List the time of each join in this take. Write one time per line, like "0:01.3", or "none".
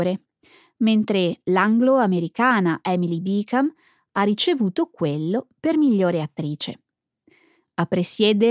none

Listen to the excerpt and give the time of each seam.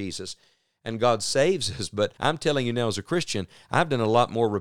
0:02.2

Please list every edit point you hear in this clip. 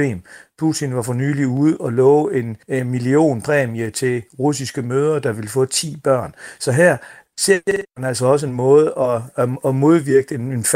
0:02.6
0:07.9

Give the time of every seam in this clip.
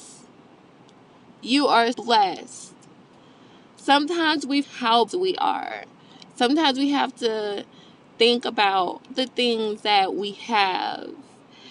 0:01.9
0:04.6
0:05.1
0:09.1

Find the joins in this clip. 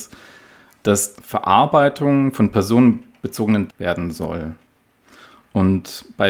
0:01.1
0:03.7

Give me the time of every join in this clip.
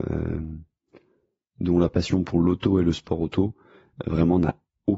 none

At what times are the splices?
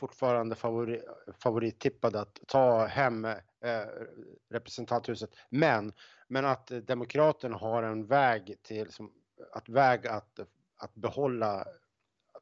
none

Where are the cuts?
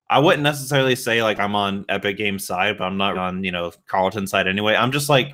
0:03.1

